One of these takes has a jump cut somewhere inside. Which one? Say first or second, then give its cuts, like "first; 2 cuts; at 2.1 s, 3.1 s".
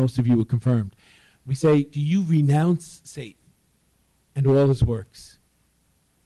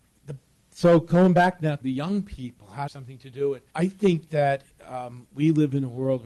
second; 3 cuts; at 1.8 s, 2.9 s, 3.7 s